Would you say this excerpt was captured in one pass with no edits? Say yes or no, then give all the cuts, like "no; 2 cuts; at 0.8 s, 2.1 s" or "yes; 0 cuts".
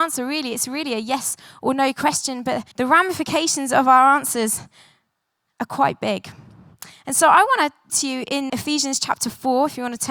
no; 3 cuts; at 2.7 s, 7.9 s, 8.5 s